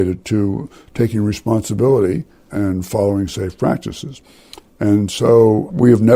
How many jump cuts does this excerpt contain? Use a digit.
0